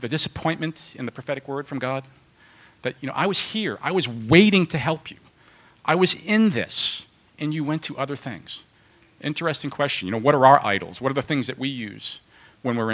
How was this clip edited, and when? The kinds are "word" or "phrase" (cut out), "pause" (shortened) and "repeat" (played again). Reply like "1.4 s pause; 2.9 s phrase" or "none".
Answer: none

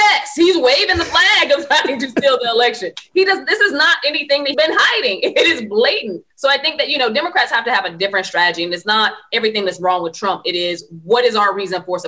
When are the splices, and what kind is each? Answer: 4.5 s word; 6.3 s pause

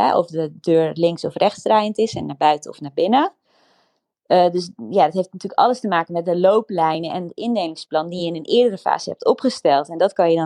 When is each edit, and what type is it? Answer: none

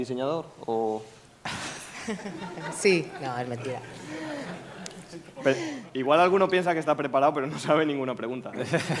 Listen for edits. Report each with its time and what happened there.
none

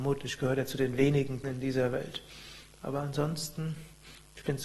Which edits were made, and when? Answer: 1.4 s word

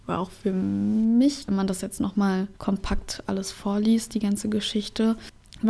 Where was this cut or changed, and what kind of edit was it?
1.5 s phrase; 2.6 s pause

